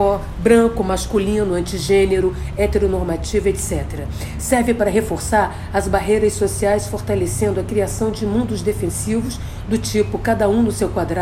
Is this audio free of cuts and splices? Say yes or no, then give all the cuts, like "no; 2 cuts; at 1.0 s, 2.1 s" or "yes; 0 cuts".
yes; 0 cuts